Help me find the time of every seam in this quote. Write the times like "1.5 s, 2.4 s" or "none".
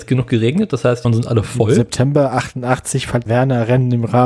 1.0 s, 3.3 s

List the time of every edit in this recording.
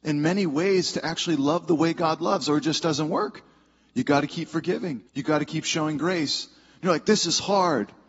5.1 s

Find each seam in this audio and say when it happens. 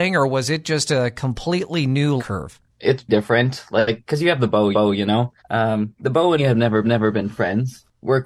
2.2 s, 3.1 s, 4.7 s, 5.4 s, 6.4 s, 6.8 s

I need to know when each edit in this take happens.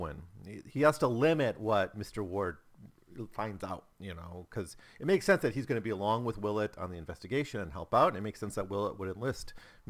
3.9 s

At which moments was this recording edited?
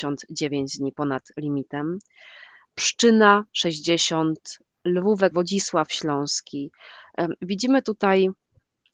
3.5 s, 5.3 s

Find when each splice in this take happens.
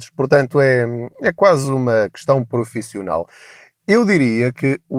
none

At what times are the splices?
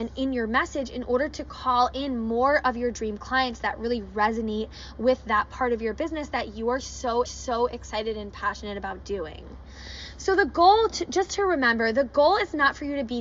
7.3 s

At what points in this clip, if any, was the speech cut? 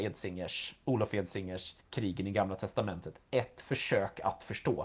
1.8 s

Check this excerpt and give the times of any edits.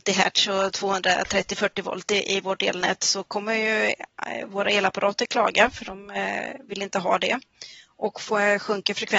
none

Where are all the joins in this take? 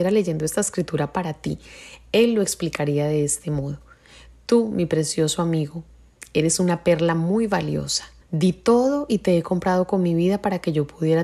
8.2 s

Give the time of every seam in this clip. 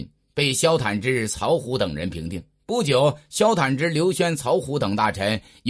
none

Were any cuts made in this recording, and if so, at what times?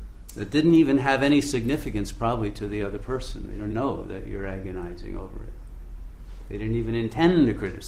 3.7 s

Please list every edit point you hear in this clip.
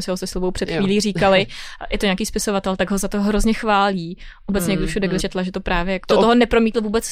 2.2 s, 5.2 s, 6.0 s

